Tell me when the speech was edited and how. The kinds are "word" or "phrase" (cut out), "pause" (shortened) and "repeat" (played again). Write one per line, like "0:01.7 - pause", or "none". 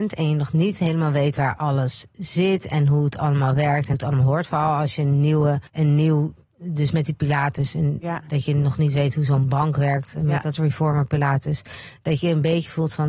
0:03.9 - word
0:05.7 - pause

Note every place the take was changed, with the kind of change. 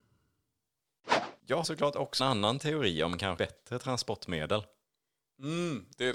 0:01.6 - phrase
0:02.2 - word
0:03.4 - word

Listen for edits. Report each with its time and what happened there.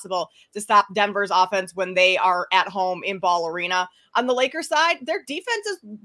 none

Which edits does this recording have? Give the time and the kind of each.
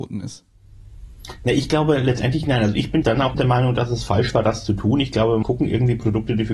0:03.0 - word
0:03.3 - word
0:05.4 - word

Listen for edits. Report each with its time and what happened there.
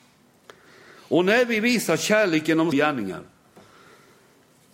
0:02.7 - word

